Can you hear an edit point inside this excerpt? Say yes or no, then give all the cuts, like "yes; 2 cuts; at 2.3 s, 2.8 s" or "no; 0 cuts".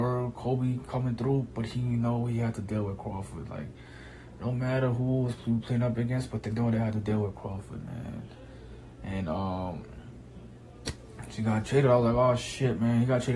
no; 0 cuts